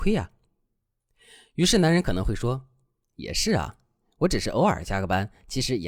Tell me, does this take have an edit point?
no; 0 cuts

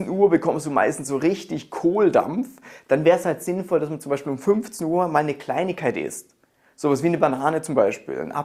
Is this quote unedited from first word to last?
yes; 0 cuts

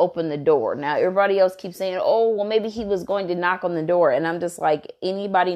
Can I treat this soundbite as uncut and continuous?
yes; 0 cuts

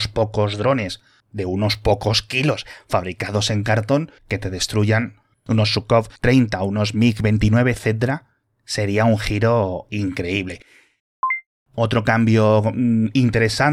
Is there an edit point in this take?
yes; 2 cuts; at 4.2 s, 6.2 s

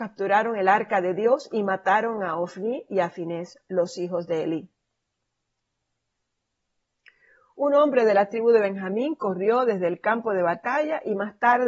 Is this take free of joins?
yes; 0 cuts

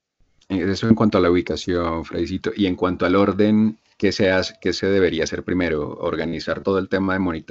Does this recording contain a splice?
no; 0 cuts

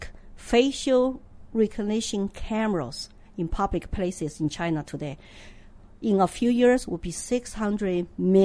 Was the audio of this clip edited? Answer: no; 0 cuts

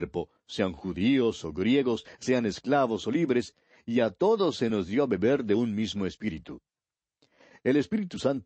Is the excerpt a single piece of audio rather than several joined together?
yes; 0 cuts

